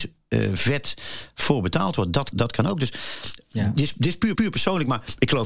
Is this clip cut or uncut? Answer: cut